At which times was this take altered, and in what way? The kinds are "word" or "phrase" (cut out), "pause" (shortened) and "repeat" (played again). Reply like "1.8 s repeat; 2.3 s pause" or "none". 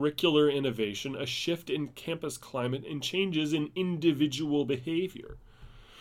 none